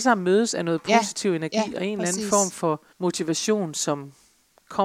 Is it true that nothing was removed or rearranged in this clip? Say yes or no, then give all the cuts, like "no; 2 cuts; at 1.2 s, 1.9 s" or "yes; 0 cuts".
no; 1 cut; at 2.9 s